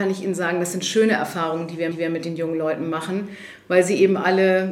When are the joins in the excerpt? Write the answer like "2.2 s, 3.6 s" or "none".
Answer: 1.9 s